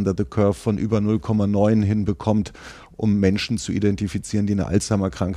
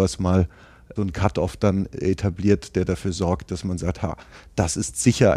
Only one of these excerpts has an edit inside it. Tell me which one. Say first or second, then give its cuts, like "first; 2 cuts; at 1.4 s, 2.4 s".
second; 1 cut; at 1.0 s